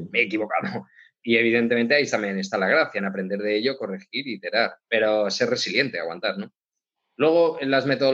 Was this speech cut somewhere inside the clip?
yes; 1 cut; at 4.8 s

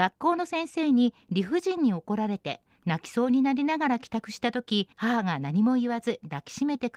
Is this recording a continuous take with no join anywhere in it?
no; 1 cut; at 4.9 s

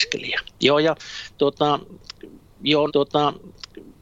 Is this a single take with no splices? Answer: no; 1 cut; at 2.9 s

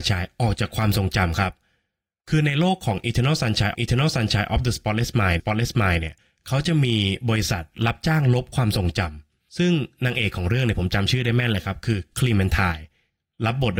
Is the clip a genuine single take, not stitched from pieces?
no; 2 cuts; at 3.7 s, 5.4 s

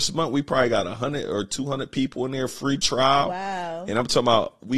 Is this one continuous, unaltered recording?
yes; 0 cuts

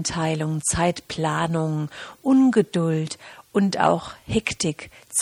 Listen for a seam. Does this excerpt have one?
no; 0 cuts

